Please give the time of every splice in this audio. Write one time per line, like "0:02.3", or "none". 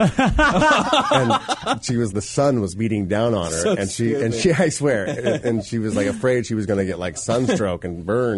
0:02.1